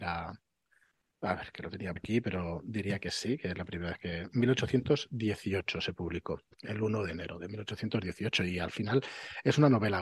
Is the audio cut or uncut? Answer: cut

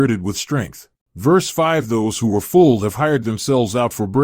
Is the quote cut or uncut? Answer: uncut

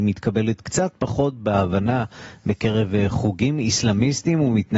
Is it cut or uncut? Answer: uncut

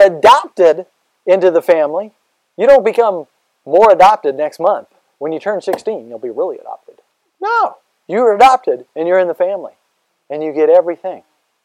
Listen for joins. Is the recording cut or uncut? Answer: uncut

